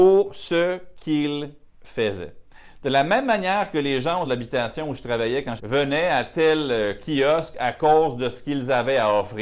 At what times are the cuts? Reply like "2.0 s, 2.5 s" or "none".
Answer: 4.2 s, 5.6 s